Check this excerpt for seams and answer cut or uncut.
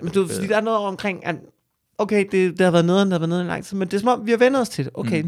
uncut